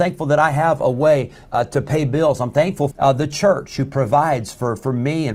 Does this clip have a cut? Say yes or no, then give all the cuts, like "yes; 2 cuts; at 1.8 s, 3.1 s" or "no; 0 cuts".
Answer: yes; 1 cut; at 2.9 s